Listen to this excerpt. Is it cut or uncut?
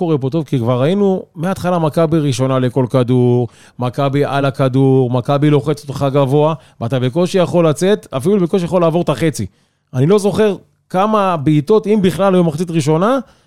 uncut